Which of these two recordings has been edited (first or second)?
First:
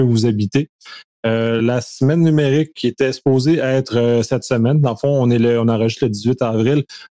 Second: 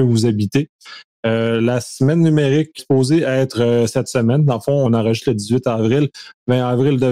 second